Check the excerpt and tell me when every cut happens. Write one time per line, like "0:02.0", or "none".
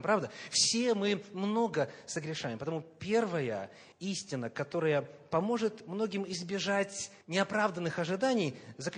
0:03.9
0:07.2